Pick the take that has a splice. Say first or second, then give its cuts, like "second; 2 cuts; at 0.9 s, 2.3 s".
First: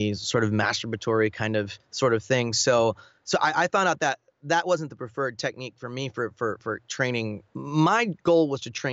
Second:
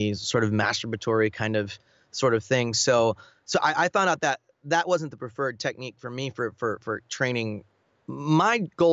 first; 2 cuts; at 1.8 s, 7.5 s